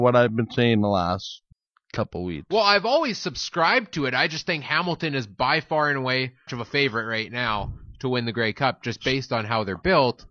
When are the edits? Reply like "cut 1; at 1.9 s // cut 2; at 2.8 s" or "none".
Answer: cut 1; at 1.5 s // cut 2; at 6.5 s